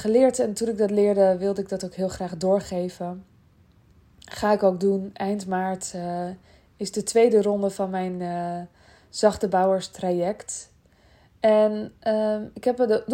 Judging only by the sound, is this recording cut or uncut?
uncut